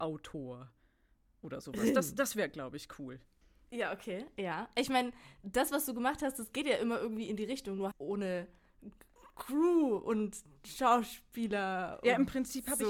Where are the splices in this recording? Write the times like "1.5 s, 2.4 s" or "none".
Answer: 3.4 s, 7.9 s